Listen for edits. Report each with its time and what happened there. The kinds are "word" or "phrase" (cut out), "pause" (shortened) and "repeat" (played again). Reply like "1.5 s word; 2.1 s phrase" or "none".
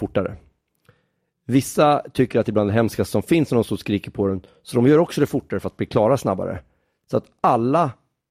none